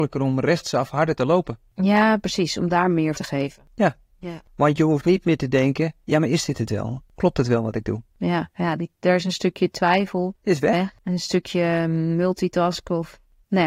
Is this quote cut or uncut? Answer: cut